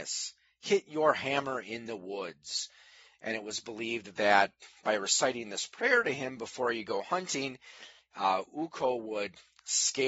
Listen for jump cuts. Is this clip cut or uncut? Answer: uncut